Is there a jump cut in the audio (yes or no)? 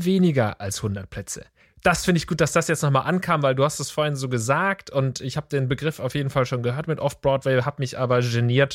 yes